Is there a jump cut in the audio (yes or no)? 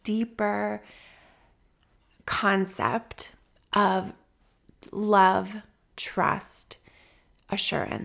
no